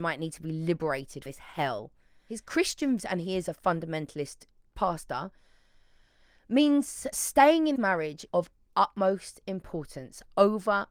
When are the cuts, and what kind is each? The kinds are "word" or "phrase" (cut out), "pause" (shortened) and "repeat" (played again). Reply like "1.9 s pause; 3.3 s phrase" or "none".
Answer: 1.3 s word; 3.0 s word; 4.7 s word; 7.1 s word; 7.8 s word; 8.3 s word